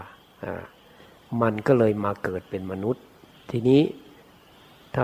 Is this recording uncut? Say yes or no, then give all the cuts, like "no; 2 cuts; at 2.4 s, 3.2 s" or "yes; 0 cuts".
yes; 0 cuts